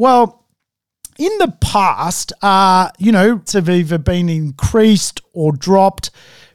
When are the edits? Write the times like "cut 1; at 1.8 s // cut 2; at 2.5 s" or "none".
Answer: cut 1; at 3.5 s